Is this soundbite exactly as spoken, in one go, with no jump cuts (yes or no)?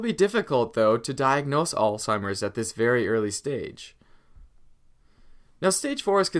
yes